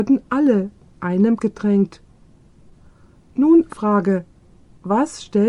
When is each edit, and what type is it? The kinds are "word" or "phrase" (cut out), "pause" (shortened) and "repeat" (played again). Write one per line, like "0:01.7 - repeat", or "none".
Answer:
0:00.9 - word
0:01.4 - word
0:03.7 - word